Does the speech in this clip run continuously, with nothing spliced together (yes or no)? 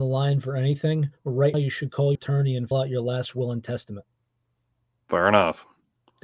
no